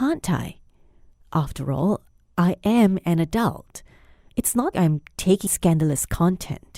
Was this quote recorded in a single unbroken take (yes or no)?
no